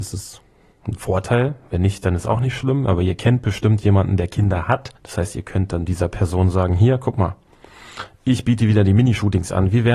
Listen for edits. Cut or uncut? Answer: cut